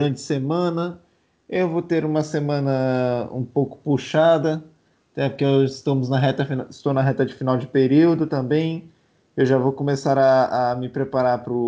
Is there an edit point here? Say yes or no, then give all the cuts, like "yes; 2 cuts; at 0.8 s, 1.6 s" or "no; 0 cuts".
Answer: no; 0 cuts